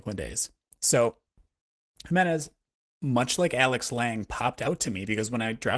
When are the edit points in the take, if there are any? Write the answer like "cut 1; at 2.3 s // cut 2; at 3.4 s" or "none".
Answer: none